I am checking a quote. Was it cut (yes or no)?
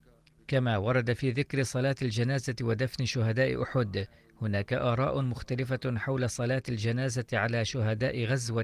no